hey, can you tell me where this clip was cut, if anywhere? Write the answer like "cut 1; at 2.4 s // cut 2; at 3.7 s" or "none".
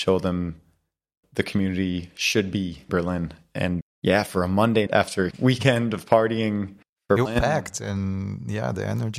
cut 1; at 1.2 s // cut 2; at 2.9 s // cut 3; at 3.8 s // cut 4; at 4.9 s // cut 5; at 5.3 s // cut 6; at 6.8 s // cut 7; at 7.3 s